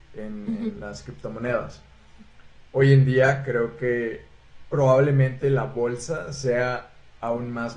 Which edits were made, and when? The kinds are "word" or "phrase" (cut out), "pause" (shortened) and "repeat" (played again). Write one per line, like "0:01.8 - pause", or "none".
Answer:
none